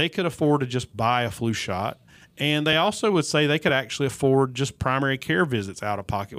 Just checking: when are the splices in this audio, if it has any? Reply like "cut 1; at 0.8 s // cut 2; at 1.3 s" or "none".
none